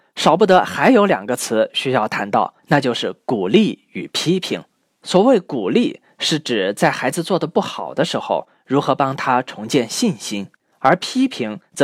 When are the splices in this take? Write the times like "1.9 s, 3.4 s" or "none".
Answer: 2.6 s, 4.8 s, 10.7 s